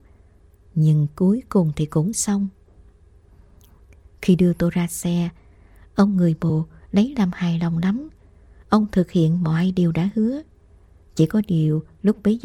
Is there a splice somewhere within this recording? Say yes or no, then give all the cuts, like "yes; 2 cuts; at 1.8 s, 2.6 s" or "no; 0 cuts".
no; 0 cuts